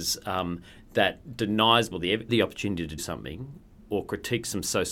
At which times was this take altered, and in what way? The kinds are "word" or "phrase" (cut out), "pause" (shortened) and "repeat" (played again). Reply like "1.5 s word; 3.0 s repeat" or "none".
1.9 s word; 2.3 s word; 3.0 s word